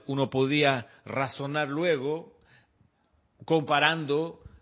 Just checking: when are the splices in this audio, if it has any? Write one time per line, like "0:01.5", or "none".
none